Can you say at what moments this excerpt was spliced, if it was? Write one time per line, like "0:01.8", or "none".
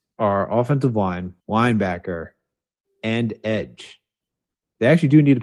0:01.4